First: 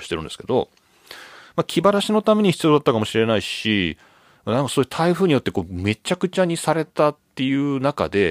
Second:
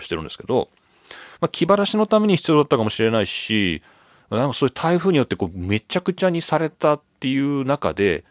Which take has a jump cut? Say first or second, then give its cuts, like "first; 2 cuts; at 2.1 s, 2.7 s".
second; 1 cut; at 1.3 s